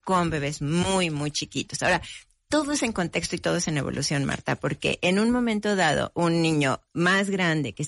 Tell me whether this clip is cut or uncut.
uncut